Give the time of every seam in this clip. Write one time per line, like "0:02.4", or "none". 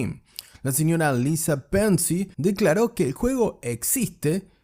0:02.3